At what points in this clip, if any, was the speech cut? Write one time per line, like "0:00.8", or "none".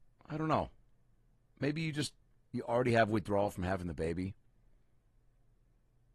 0:02.2